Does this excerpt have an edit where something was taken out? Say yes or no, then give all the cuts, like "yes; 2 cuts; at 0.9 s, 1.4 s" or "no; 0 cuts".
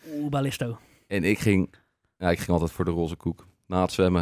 no; 0 cuts